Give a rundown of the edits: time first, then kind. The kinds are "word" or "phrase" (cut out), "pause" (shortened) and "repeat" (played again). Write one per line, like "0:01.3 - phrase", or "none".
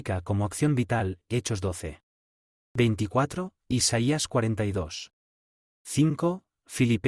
none